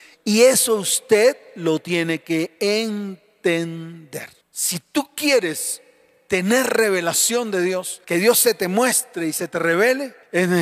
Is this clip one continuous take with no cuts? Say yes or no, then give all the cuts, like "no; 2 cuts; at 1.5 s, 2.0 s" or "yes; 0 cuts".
yes; 0 cuts